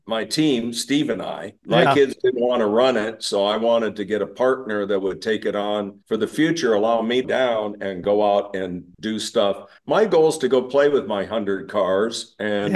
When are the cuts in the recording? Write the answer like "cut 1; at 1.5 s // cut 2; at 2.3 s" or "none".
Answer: cut 1; at 1.6 s // cut 2; at 6.0 s // cut 3; at 7.2 s // cut 4; at 9.8 s